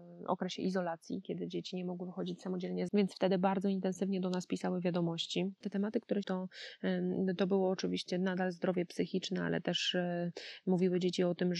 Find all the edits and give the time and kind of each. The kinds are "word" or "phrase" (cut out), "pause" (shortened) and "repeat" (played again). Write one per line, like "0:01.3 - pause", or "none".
0:02.9 - phrase
0:06.2 - phrase